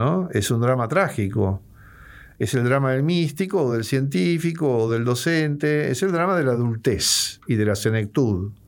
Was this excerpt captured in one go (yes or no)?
yes